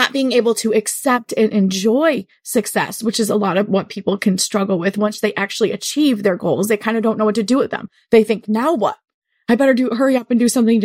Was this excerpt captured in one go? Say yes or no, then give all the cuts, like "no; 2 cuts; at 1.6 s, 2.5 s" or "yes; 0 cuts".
yes; 0 cuts